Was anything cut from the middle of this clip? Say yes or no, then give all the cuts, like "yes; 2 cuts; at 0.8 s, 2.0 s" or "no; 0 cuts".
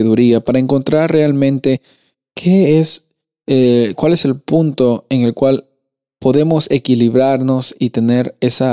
no; 0 cuts